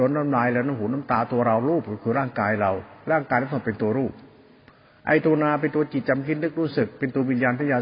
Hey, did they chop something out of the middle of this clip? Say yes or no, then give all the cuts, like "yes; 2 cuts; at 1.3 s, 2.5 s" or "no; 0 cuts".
no; 0 cuts